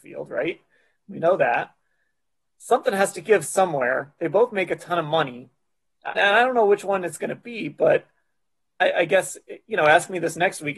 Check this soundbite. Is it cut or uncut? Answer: cut